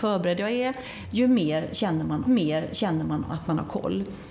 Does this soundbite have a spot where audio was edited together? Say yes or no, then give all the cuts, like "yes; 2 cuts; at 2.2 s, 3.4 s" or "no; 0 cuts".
yes; 1 cut; at 2.3 s